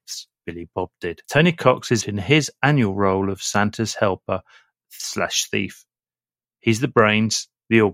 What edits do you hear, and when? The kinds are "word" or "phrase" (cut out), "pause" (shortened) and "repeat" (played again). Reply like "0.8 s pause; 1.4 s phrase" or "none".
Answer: 1.2 s pause; 2.0 s word